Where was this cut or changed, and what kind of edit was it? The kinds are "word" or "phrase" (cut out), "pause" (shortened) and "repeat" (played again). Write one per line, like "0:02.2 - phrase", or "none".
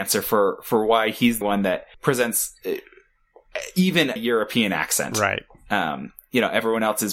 0:01.4 - word
0:01.9 - pause
0:04.2 - word